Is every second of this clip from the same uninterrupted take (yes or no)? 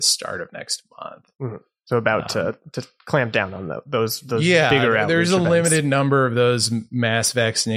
yes